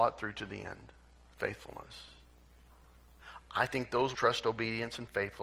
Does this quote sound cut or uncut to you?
cut